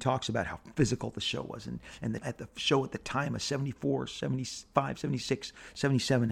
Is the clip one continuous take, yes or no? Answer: no